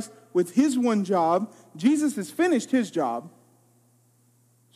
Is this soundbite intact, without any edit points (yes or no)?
yes